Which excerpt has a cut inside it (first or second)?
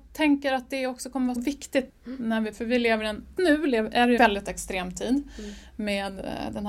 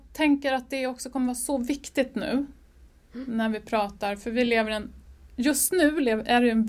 first